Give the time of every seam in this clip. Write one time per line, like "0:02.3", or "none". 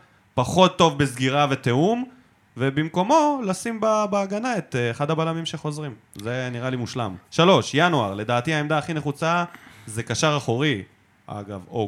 0:07.2